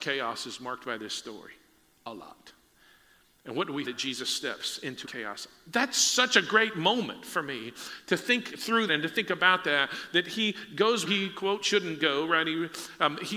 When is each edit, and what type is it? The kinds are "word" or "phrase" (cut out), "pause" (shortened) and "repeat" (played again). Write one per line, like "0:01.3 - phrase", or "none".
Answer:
0:03.8 - word
0:05.0 - word
0:08.9 - word
0:11.1 - word